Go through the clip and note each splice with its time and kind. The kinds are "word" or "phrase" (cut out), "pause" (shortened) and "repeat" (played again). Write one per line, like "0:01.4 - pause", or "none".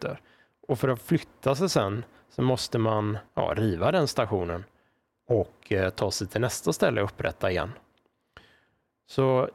0:03.3 - pause